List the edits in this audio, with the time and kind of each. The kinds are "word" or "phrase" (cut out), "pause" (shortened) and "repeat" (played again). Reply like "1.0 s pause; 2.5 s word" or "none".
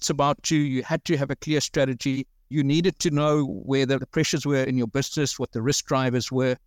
none